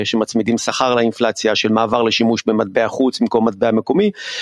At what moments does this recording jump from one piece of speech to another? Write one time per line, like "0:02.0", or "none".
none